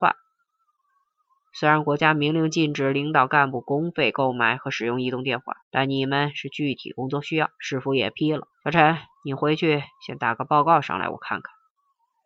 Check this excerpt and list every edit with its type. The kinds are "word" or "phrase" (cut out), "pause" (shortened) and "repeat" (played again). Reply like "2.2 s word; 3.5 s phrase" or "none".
5.6 s pause; 7.5 s pause; 8.5 s pause; 9.1 s pause